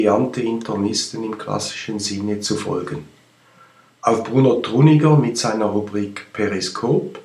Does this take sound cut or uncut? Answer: uncut